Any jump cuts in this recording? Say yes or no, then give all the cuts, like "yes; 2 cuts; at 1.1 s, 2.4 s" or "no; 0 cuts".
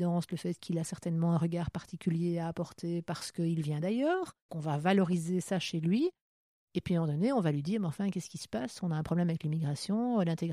yes; 1 cut; at 4.5 s